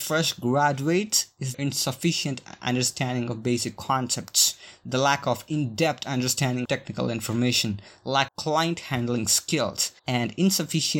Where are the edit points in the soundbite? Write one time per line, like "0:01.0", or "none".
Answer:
0:01.5
0:06.7
0:08.3
0:10.0